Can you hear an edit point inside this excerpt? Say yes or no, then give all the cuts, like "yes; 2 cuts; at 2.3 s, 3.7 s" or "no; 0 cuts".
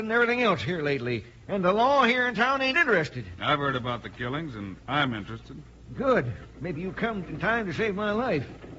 yes; 2 cuts; at 2.7 s, 7.2 s